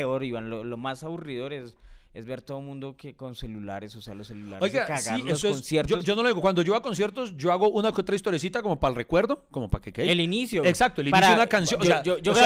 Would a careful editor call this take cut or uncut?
uncut